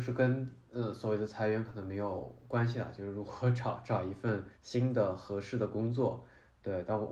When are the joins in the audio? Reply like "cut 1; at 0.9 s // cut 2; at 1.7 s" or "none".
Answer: cut 1; at 4.5 s